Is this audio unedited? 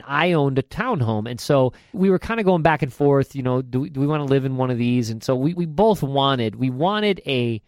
no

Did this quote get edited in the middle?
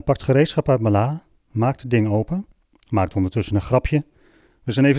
no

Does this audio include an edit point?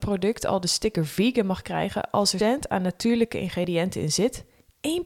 yes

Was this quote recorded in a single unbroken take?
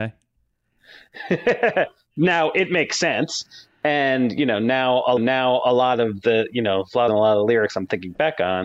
no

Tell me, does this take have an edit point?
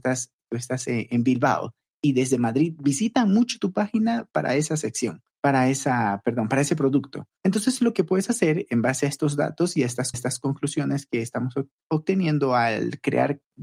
yes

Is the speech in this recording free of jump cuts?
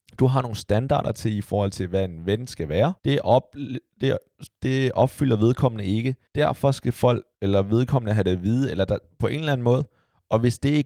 no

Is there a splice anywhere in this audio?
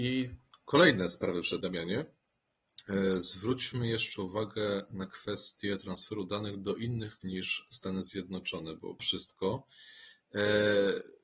yes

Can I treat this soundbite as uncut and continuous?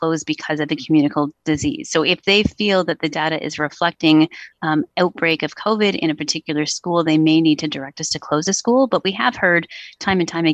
yes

